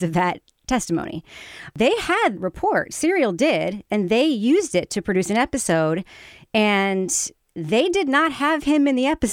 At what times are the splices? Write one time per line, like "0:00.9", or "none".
0:02.4